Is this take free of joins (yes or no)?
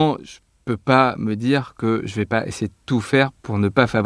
yes